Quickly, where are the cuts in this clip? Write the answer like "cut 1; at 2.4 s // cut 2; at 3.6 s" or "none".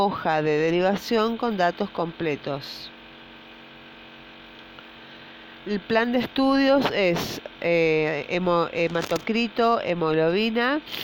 none